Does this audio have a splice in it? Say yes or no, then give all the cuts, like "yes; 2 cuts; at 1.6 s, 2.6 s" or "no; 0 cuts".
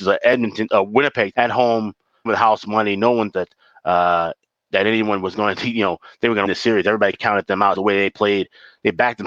yes; 6 cuts; at 1.3 s, 2.3 s, 3.3 s, 6.4 s, 7.1 s, 7.7 s